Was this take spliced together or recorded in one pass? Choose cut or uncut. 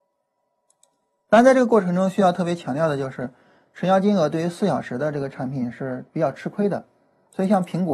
uncut